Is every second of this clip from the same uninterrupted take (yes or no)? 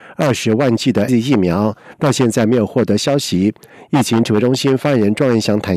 no